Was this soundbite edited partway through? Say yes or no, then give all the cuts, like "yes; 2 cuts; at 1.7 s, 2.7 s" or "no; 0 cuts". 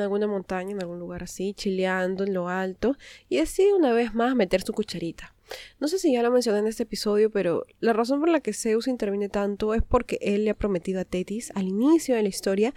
no; 0 cuts